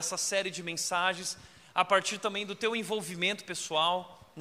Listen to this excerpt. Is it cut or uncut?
uncut